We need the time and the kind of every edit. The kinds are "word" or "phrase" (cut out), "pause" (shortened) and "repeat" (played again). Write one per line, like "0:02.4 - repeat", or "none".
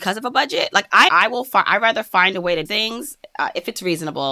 0:01.1 - phrase
0:02.7 - word